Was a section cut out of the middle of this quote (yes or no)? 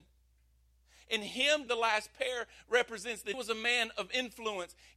yes